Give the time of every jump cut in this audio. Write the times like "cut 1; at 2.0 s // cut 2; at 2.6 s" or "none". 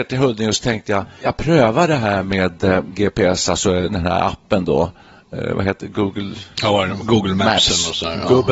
cut 1; at 1.2 s